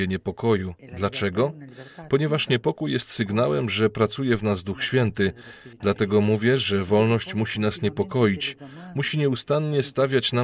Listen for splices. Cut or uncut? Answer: uncut